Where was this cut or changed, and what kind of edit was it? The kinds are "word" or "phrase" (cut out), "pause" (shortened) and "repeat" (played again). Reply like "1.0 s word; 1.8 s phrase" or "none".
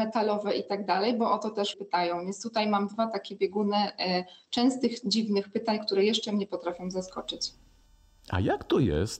1.7 s word